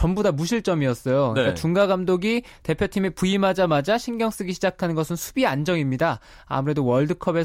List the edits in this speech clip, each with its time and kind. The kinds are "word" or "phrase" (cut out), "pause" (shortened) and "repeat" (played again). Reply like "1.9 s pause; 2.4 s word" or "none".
none